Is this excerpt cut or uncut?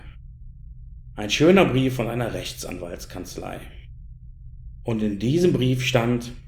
uncut